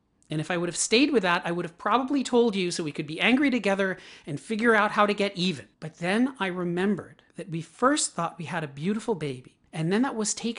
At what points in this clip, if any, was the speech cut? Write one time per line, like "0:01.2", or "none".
0:05.7
0:07.3